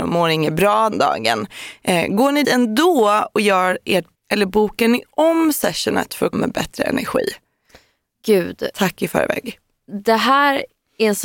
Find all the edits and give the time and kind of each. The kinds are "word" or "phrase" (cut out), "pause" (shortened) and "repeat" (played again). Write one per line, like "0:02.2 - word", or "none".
0:00.9 - word
0:02.4 - word
0:04.2 - word
0:06.3 - word